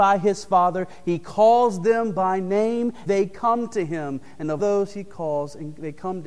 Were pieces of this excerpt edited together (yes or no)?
yes